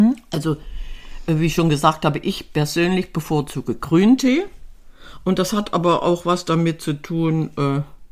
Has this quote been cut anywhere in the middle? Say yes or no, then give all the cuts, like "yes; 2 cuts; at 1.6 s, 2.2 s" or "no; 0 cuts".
no; 0 cuts